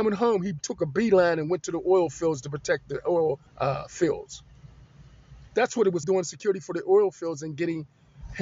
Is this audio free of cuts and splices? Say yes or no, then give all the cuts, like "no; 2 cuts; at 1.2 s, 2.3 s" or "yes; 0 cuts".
no; 2 cuts; at 3.5 s, 6.0 s